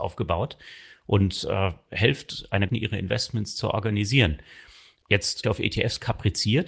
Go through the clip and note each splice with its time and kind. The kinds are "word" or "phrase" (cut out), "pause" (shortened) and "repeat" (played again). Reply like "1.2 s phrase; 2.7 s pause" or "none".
2.7 s phrase; 5.4 s phrase

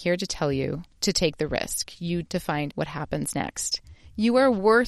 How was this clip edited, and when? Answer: 0.9 s pause; 2.2 s word; 2.7 s word

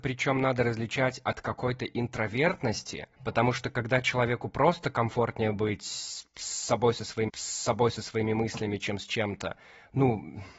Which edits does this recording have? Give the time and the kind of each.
3.1 s pause; 7.3 s repeat

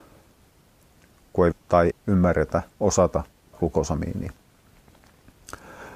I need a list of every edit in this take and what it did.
1.5 s word; 1.9 s word; 3.5 s word

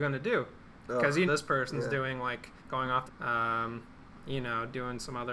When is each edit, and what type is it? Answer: 1.3 s phrase; 2.6 s pause; 3.1 s phrase

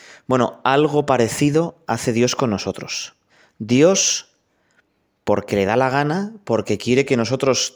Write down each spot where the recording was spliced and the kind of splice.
3.3 s pause

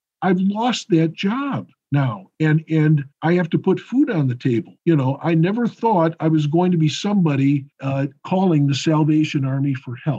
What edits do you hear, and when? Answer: 3.1 s pause; 4.8 s pause; 7.7 s pause

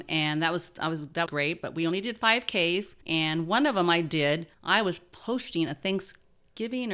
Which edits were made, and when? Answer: 1.3 s word; 3.0 s pause; 4.5 s pause

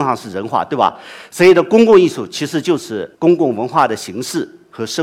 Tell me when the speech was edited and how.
3.1 s pause

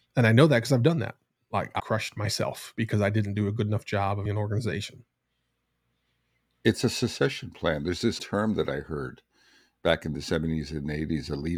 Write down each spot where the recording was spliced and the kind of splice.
1.8 s word; 4.3 s word; 8.2 s word

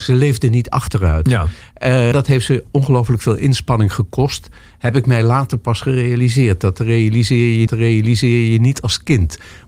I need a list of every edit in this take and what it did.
2.1 s word; 7.7 s repeat

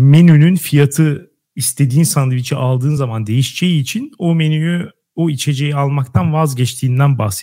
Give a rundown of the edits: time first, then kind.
none

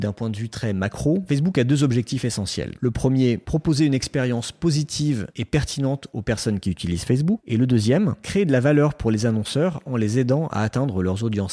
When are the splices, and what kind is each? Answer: none

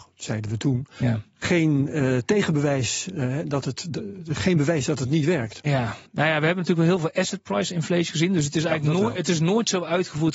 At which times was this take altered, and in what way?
6.1 s pause

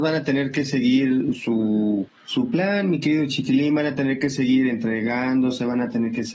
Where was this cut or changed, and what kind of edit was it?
2.2 s pause

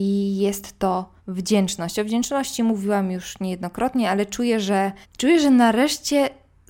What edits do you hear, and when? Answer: 1.2 s pause; 5.0 s pause

